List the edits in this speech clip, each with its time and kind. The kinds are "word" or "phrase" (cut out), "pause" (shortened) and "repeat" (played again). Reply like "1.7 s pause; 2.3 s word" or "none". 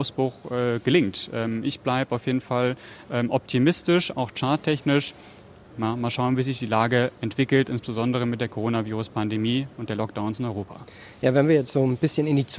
none